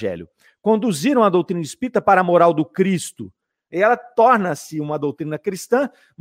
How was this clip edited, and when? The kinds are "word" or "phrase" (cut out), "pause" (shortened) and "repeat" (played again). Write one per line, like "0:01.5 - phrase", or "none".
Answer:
none